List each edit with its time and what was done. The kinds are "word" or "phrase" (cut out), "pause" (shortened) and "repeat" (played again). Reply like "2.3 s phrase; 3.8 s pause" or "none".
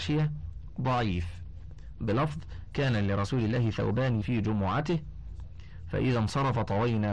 4.2 s word